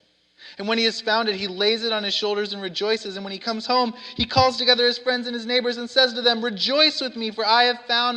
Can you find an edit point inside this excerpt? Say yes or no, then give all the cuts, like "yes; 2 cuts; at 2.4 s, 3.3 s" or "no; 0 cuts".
no; 0 cuts